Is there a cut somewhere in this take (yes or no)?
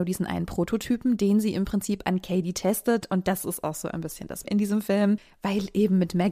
yes